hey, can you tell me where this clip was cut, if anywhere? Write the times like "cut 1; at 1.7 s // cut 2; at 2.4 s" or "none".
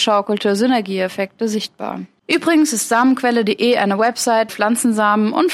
cut 1; at 4.5 s